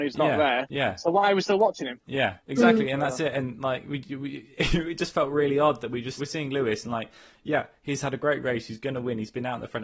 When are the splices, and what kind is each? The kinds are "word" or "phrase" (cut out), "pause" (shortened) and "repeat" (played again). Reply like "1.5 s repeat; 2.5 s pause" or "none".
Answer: 2.4 s pause; 6.2 s word